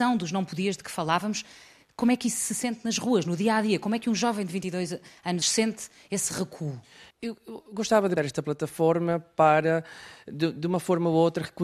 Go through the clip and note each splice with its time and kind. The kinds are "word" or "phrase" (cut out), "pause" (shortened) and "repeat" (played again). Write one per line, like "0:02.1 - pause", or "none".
0:05.4 - phrase
0:07.1 - pause
0:08.2 - word